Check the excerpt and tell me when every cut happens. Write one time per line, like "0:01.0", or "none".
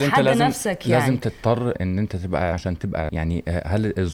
0:01.7
0:02.5
0:03.1